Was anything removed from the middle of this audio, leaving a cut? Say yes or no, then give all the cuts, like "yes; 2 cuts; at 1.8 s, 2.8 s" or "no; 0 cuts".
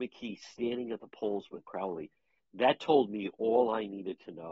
yes; 1 cut; at 1.6 s